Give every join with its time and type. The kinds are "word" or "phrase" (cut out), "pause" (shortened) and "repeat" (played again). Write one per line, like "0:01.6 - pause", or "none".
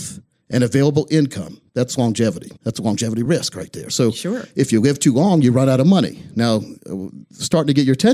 0:01.7 - pause
0:02.6 - pause